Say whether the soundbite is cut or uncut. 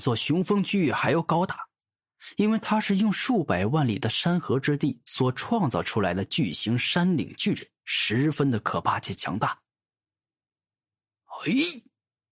uncut